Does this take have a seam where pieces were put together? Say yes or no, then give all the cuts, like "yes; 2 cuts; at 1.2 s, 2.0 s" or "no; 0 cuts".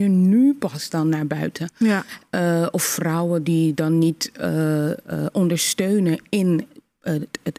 no; 0 cuts